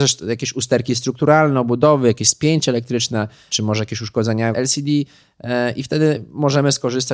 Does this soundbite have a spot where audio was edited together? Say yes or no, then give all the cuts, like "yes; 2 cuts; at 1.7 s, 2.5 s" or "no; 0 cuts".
yes; 1 cut; at 4.5 s